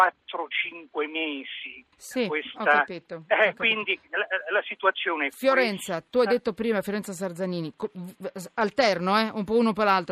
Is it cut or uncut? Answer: cut